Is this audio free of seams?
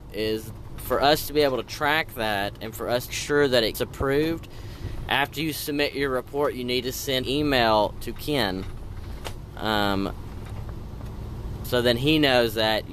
no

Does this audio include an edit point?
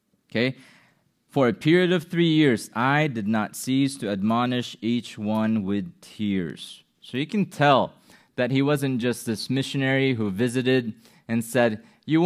no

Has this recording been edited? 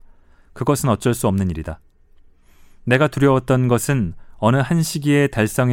no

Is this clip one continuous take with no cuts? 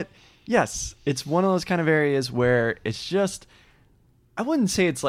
yes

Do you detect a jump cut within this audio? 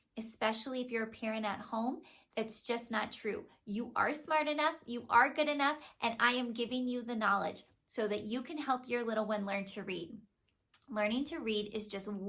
no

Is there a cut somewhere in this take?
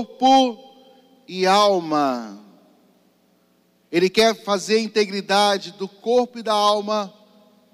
no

